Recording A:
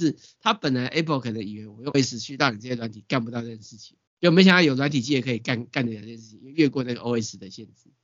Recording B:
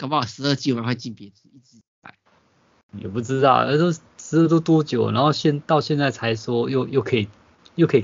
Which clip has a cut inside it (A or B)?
A